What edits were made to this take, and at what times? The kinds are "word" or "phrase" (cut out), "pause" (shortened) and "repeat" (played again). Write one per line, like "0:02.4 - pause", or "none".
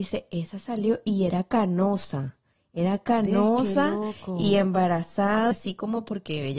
0:05.5 - word